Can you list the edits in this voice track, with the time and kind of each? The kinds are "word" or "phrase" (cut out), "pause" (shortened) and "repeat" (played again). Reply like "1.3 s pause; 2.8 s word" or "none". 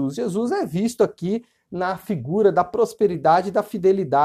none